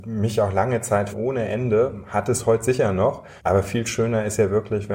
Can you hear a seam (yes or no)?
yes